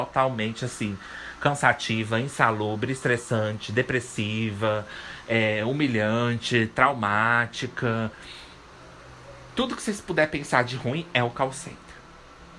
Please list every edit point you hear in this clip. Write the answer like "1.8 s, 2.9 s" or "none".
none